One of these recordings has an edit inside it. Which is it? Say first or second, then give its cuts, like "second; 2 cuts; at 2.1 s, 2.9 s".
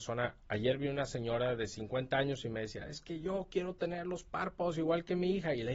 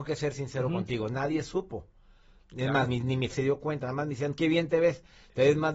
second; 3 cuts; at 2.9 s, 3.3 s, 4.4 s